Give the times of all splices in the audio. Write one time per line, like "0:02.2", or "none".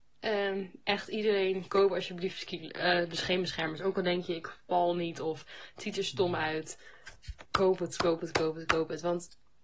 0:07.5